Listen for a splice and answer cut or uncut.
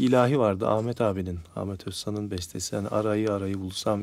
uncut